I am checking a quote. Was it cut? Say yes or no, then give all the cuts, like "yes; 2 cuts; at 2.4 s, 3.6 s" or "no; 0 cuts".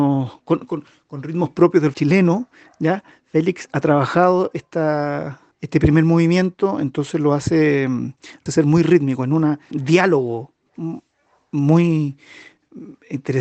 yes; 4 cuts; at 1.9 s, 5.5 s, 8.5 s, 9.7 s